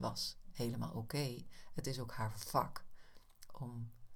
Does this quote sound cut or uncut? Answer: uncut